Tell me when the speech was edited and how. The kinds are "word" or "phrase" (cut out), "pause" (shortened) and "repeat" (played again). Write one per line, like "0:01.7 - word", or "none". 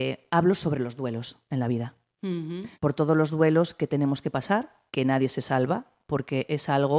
0:02.7 - pause
0:04.9 - pause